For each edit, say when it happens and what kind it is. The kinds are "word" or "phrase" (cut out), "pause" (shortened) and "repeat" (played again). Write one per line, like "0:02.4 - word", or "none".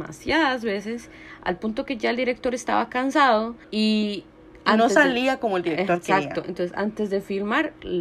0:03.6 - pause